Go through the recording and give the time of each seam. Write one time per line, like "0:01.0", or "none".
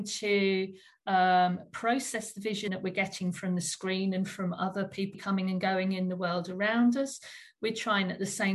0:02.7
0:05.1

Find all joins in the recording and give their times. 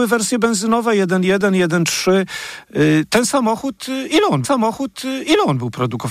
0:04.4

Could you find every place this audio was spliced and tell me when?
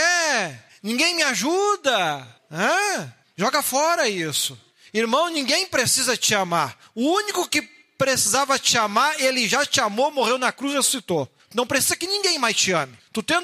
none

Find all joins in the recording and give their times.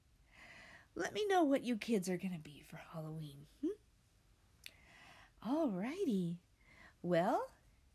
none

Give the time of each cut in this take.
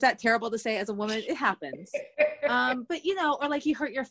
none

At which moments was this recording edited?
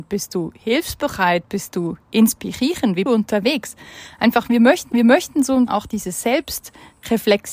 0:02.0
0:03.1
0:04.9
0:05.7

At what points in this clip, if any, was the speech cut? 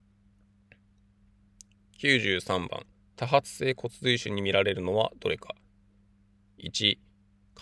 0:02.9

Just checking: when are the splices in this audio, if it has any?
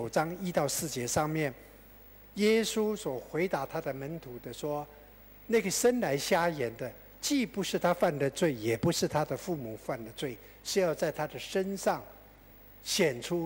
none

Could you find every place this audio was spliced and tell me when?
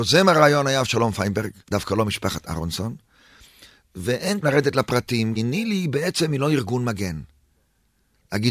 0:01.6
0:04.4
0:05.4

